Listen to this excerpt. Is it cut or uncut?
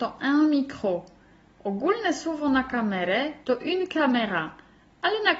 uncut